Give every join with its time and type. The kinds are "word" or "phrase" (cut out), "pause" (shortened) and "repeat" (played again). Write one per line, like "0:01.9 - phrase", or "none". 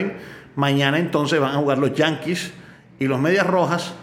none